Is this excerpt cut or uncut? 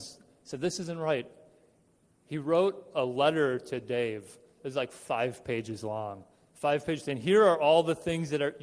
uncut